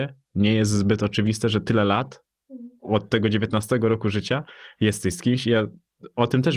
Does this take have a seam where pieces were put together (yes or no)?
no